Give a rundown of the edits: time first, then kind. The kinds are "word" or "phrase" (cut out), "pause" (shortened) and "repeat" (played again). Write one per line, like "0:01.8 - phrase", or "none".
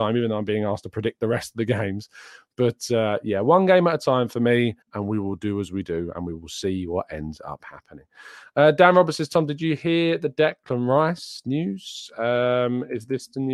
0:04.8 - pause